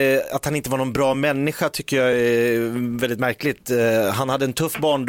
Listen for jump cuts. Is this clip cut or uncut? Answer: uncut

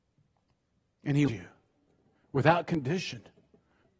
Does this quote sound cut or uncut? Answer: cut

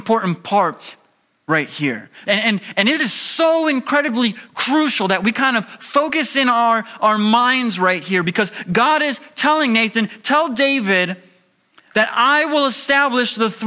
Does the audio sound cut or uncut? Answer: uncut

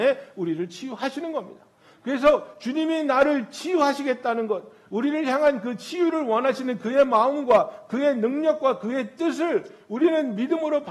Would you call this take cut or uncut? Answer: uncut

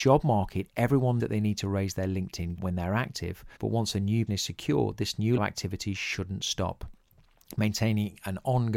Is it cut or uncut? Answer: cut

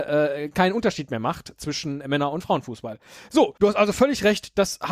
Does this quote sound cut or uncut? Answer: cut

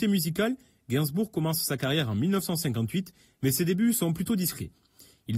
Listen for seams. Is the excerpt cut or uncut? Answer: uncut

